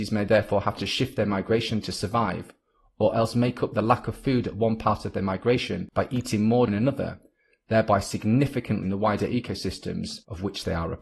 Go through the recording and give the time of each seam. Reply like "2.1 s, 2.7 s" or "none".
1.8 s, 6.7 s, 8.8 s